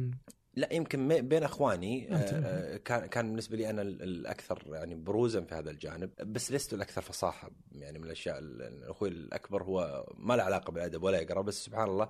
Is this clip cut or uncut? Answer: cut